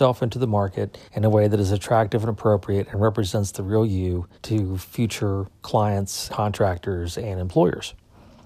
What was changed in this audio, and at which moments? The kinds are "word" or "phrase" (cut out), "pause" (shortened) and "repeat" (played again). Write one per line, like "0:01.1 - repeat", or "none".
0:01.1 - pause
0:04.3 - pause
0:06.3 - word